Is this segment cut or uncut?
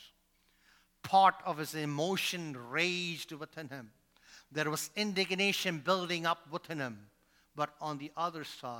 uncut